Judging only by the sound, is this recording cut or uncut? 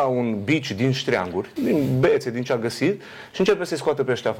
cut